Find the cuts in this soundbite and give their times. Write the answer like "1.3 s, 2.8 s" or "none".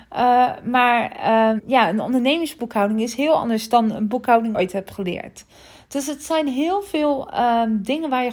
1.6 s, 4.5 s